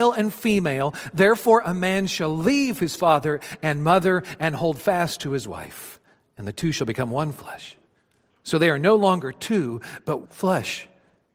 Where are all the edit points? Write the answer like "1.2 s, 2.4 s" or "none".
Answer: 10.2 s